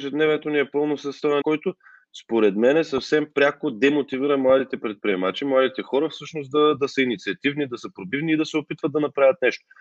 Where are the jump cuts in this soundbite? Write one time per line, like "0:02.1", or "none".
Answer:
0:01.4
0:06.8